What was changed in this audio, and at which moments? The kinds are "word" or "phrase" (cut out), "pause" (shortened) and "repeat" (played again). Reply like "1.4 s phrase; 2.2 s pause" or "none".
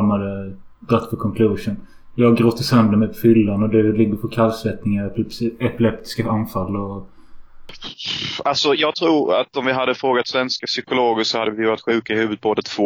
none